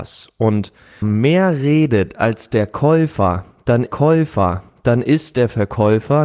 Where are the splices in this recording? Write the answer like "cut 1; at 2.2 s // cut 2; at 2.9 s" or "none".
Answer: cut 1; at 1.0 s // cut 2; at 3.9 s